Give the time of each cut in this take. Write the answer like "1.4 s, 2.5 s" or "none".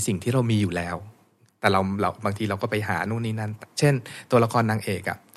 none